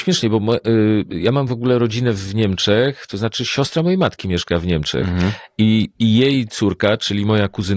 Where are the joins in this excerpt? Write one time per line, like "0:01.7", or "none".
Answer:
none